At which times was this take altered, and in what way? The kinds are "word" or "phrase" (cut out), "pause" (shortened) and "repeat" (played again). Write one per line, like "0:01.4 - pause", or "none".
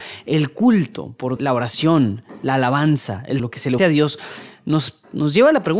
0:01.4 - word
0:03.4 - word
0:03.8 - word